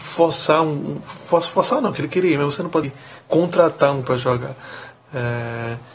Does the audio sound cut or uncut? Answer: cut